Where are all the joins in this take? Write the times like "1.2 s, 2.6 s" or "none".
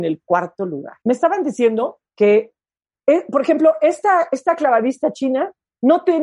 1.0 s, 2.1 s